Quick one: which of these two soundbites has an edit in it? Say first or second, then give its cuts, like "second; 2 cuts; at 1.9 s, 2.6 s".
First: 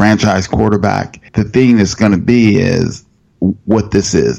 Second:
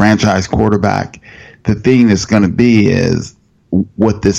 first; 1 cut; at 1.3 s